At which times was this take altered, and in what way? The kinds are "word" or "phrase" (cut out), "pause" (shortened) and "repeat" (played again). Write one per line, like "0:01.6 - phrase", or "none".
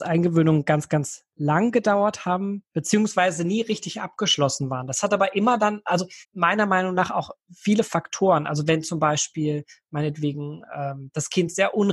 0:06.2 - pause